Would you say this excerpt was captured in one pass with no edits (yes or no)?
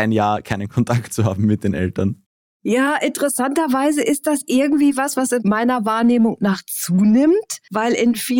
yes